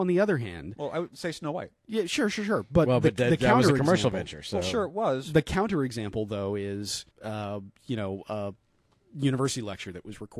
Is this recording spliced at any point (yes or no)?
yes